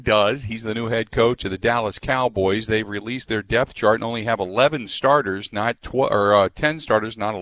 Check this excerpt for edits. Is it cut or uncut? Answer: uncut